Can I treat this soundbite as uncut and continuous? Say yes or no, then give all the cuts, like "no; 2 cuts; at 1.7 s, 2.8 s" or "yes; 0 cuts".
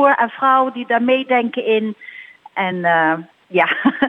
yes; 0 cuts